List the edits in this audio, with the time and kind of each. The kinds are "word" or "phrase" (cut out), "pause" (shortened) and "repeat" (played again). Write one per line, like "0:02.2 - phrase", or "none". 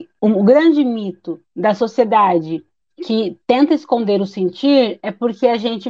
none